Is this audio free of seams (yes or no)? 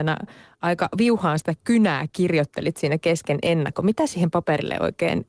yes